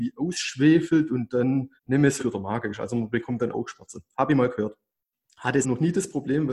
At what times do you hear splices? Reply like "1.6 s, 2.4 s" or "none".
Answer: 1.8 s, 2.2 s, 3.5 s, 5.6 s